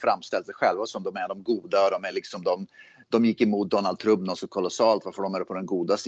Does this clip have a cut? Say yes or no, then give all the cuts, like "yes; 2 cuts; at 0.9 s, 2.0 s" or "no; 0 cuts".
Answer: no; 0 cuts